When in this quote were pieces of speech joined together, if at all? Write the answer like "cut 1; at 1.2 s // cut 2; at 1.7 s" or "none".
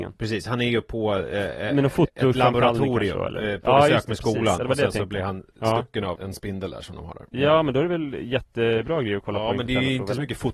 cut 1; at 6.2 s